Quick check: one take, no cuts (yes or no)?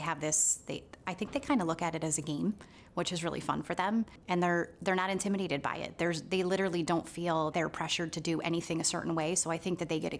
no